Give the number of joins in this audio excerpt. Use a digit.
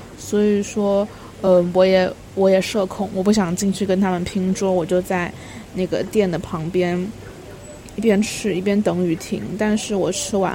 0